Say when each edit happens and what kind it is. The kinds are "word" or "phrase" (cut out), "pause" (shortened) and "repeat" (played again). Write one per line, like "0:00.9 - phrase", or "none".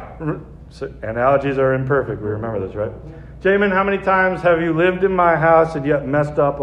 none